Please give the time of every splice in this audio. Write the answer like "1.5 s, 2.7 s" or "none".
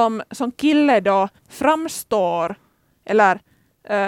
1.4 s